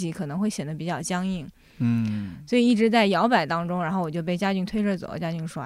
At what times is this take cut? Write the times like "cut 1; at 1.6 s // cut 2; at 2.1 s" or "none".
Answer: none